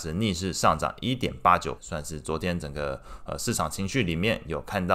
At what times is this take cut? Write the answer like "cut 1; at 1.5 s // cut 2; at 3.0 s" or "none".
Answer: cut 1; at 1.8 s

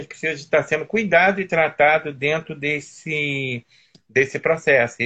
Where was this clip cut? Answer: none

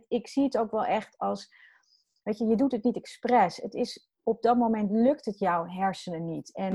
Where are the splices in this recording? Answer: none

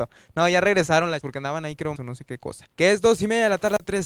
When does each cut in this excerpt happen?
cut 1; at 1.2 s // cut 2; at 2.0 s // cut 3; at 2.7 s

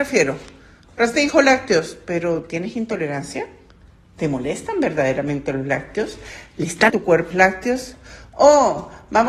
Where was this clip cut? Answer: cut 1; at 6.9 s // cut 2; at 7.3 s

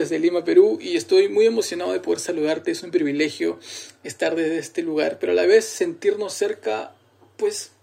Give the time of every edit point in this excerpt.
none

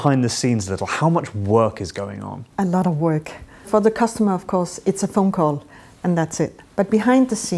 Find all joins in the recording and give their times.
none

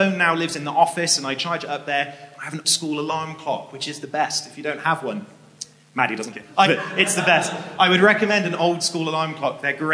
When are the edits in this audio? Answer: cut 1; at 2.6 s // cut 2; at 6.3 s // cut 3; at 6.7 s

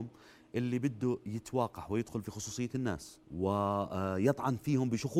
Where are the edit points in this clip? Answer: cut 1; at 3.2 s

